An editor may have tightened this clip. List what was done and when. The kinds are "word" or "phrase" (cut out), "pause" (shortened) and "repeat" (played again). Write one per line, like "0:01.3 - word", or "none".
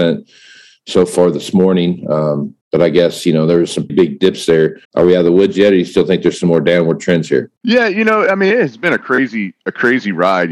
0:02.6 - pause
0:03.9 - word
0:04.8 - pause
0:07.6 - pause